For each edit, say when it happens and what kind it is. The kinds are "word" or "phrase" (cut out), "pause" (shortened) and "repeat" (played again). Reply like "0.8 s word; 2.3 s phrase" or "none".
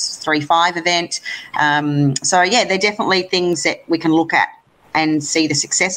none